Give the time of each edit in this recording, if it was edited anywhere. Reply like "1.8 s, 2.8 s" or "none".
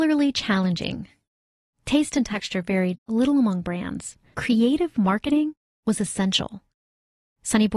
4.3 s